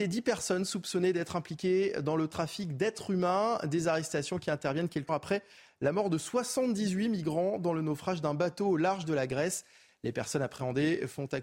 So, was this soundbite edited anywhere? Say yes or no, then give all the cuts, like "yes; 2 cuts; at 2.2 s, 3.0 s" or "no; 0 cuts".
yes; 1 cut; at 5.1 s